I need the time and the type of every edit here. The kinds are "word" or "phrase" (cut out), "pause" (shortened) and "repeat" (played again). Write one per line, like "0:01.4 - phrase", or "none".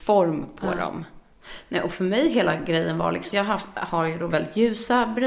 0:03.3 - word